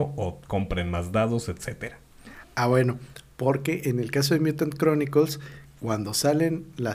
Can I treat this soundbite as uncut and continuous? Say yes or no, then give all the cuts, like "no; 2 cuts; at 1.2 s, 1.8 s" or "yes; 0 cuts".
yes; 0 cuts